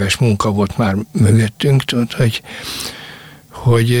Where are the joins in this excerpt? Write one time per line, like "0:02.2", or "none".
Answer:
none